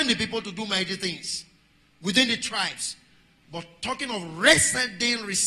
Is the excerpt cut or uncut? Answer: uncut